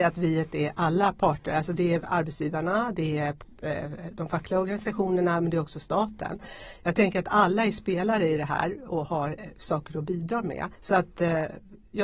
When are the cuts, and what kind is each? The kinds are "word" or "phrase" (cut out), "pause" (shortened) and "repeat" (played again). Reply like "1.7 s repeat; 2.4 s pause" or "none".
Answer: 10.7 s pause